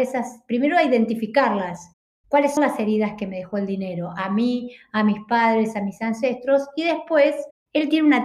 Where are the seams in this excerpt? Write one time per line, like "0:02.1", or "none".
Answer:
0:02.6